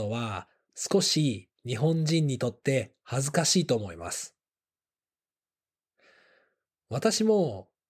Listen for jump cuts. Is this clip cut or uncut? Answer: uncut